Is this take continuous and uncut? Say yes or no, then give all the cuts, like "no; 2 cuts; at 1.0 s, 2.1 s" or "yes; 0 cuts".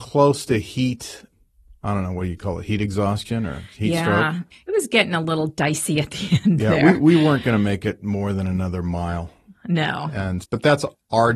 yes; 0 cuts